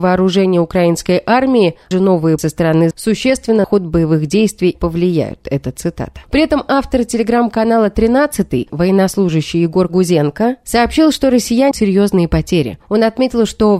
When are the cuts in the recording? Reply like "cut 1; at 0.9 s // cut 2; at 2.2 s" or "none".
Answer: cut 1; at 1.9 s // cut 2; at 2.4 s // cut 3; at 2.9 s // cut 4; at 3.6 s // cut 5; at 4.7 s // cut 6; at 6.2 s // cut 7; at 8.7 s // cut 8; at 11.7 s